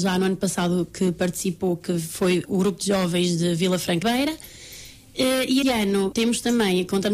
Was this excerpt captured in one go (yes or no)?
no